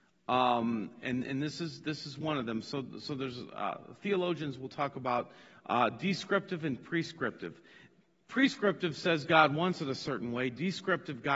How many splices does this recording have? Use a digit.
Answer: 0